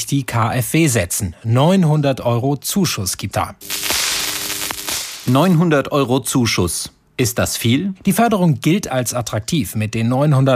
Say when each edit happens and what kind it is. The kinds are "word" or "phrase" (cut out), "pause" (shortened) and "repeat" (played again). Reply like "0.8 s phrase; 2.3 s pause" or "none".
3.3 s word